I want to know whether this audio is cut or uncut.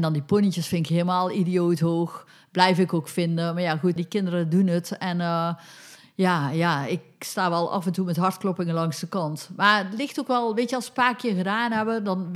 cut